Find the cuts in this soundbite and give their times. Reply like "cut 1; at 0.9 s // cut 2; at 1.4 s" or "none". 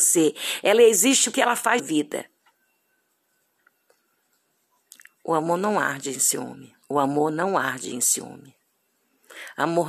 cut 1; at 1.3 s // cut 2; at 1.8 s // cut 3; at 6.8 s